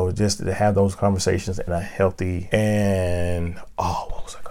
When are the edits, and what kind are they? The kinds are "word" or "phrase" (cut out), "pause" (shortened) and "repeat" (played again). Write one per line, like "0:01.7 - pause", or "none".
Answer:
0:01.7 - word
0:02.5 - word